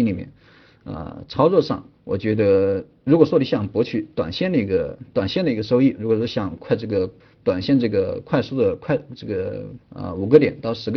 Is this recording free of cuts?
no; 3 cuts; at 1.9 s, 7.2 s, 9.8 s

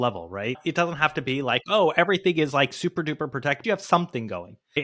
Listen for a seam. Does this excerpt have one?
yes; 1 cut; at 3.6 s

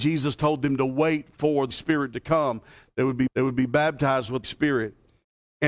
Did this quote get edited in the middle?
yes; 3 cuts; at 1.7 s, 3.3 s, 4.4 s

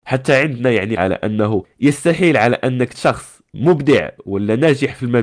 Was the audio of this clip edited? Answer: yes; 2 cuts; at 1.0 s, 2.9 s

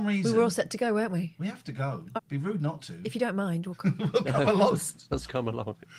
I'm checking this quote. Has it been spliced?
yes; 2 cuts; at 2.2 s, 5.1 s

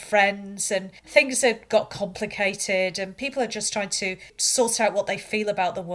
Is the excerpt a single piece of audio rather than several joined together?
yes; 0 cuts

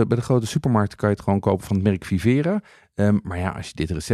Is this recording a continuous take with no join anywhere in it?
yes; 0 cuts

